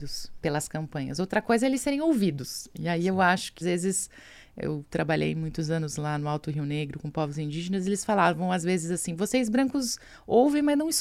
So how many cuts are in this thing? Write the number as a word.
one